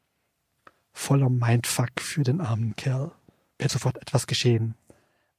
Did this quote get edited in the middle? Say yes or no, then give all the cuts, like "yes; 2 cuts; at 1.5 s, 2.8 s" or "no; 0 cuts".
yes; 1 cut; at 3.7 s